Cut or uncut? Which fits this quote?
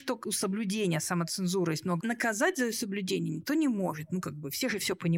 cut